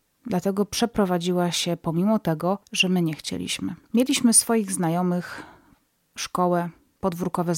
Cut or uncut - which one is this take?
cut